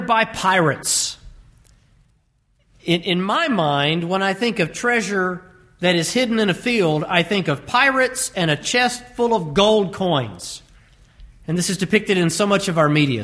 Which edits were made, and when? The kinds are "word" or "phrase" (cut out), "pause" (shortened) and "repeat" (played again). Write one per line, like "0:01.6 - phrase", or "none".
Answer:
none